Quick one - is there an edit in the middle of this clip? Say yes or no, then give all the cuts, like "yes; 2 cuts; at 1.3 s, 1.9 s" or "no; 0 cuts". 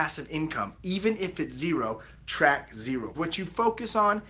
yes; 1 cut; at 3.1 s